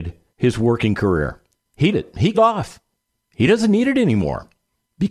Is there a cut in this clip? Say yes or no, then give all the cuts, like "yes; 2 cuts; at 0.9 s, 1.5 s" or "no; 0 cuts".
yes; 2 cuts; at 1.9 s, 2.3 s